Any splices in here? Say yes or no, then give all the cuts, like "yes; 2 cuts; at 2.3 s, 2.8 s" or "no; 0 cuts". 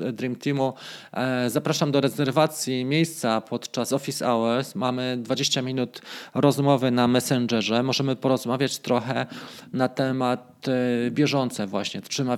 no; 0 cuts